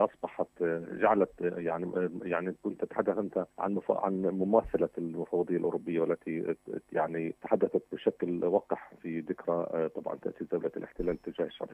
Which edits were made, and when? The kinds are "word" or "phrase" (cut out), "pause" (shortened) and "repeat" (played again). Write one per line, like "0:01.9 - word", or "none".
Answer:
0:03.5 - pause
0:07.4 - pause